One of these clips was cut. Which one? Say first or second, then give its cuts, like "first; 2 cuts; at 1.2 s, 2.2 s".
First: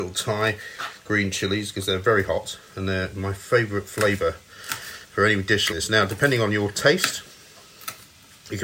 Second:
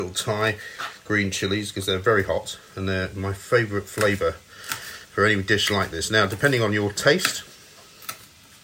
first; 1 cut; at 5.7 s